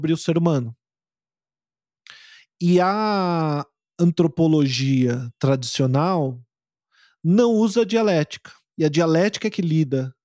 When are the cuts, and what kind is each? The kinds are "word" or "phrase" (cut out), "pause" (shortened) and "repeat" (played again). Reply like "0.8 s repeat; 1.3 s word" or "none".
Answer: none

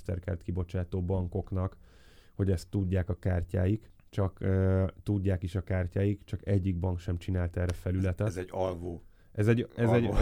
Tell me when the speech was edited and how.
none

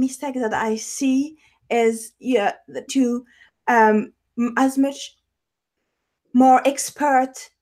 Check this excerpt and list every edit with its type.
2.9 s phrase; 4.3 s word

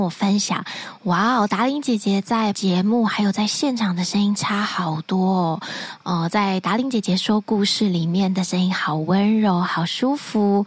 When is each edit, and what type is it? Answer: 2.5 s word

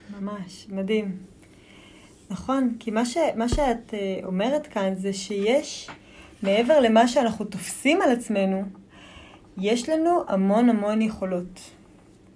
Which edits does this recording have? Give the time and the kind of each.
none

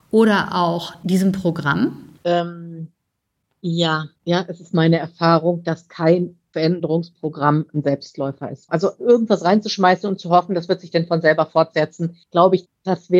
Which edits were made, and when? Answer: 2.2 s pause; 4.2 s pause; 12.2 s pause

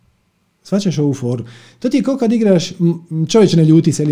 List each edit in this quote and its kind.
none

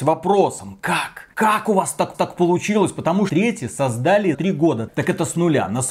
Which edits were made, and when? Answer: 1.3 s pause; 2.1 s repeat; 3.3 s phrase; 4.3 s word

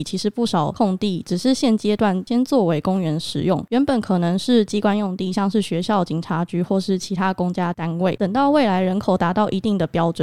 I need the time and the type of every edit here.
none

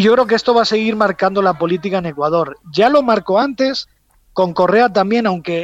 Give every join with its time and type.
none

